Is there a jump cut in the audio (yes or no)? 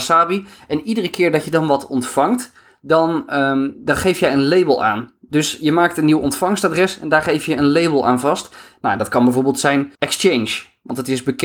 yes